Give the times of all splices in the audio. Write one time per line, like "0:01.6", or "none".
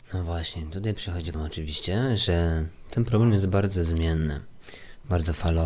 0:01.3